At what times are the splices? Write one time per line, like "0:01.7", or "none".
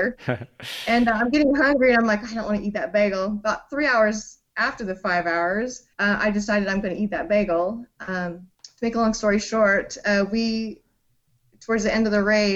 0:04.5
0:05.9
0:08.5